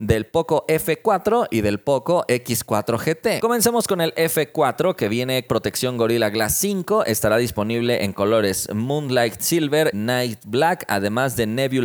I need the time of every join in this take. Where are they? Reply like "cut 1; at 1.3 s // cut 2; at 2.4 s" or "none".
cut 1; at 5.5 s // cut 2; at 9.9 s